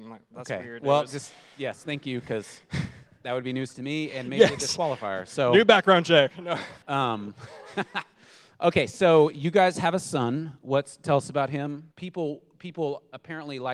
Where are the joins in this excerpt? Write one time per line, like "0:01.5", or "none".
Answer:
0:06.8
0:11.9

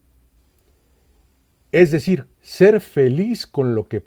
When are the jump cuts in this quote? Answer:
0:02.3

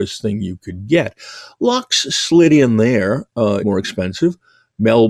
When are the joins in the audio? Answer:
0:03.6

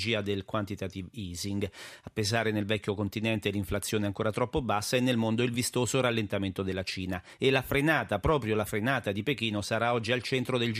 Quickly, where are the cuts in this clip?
none

